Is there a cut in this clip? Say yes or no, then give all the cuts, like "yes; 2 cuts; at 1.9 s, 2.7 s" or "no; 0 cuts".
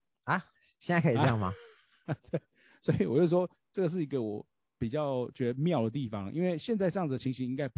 no; 0 cuts